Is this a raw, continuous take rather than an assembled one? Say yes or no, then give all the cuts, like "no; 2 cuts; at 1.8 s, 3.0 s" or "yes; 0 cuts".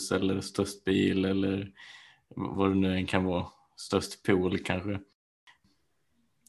yes; 0 cuts